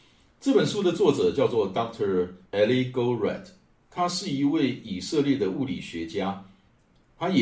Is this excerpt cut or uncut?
cut